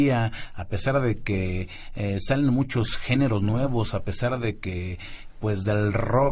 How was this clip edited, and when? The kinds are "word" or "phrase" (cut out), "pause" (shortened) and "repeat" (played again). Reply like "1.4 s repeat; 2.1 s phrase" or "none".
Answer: none